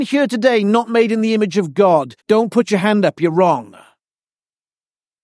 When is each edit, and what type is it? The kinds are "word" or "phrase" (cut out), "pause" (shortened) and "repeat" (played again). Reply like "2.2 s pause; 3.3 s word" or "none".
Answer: 2.2 s pause